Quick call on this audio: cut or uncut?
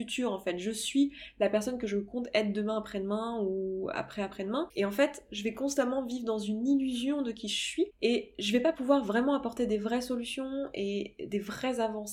uncut